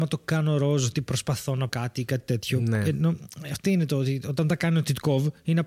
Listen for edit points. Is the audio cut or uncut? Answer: cut